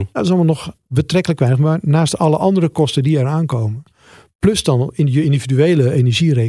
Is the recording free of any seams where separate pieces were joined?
yes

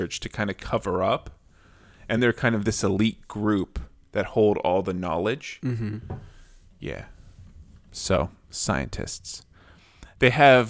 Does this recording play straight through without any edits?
yes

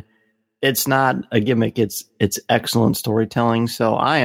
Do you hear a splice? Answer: no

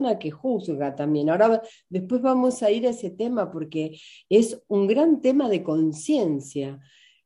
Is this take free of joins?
yes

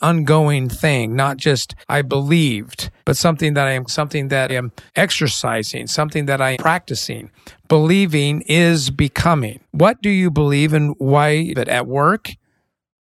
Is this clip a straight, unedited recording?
no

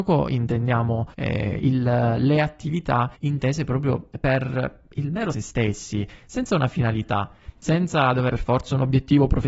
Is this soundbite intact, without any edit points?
no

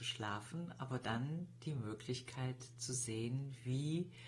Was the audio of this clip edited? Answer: no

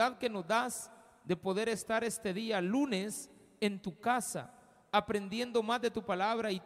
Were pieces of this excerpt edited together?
no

